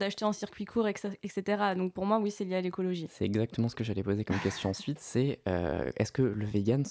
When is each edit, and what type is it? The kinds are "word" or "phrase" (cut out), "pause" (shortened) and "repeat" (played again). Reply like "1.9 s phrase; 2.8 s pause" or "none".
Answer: none